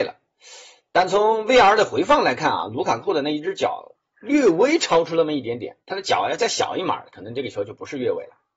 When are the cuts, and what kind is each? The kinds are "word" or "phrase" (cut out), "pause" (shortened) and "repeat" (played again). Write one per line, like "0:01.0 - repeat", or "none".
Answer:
0:03.9 - pause
0:05.8 - pause